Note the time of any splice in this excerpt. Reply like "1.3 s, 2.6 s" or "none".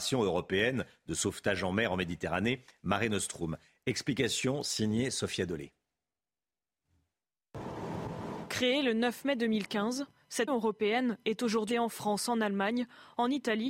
10.5 s, 11.7 s